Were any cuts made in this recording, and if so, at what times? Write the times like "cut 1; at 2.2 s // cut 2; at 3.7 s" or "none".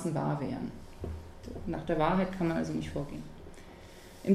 none